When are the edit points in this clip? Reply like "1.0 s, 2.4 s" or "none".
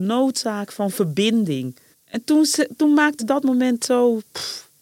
1.9 s, 3.2 s